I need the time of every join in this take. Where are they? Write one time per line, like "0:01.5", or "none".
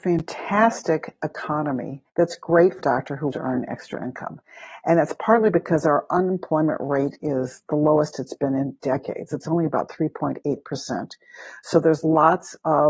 0:02.1
0:02.8
0:03.3
0:08.8